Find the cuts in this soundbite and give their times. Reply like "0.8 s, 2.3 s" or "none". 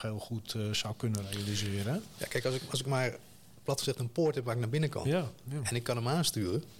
none